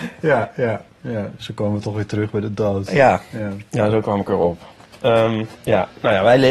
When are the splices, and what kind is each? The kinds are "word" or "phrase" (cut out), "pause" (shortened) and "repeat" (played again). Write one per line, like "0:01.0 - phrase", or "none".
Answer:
0:05.5 - pause